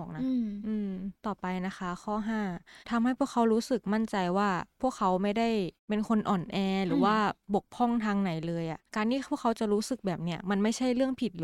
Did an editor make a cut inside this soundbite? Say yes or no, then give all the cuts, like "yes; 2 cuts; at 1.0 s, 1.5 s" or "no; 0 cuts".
yes; 4 cuts; at 1.2 s, 2.8 s, 5.8 s, 8.9 s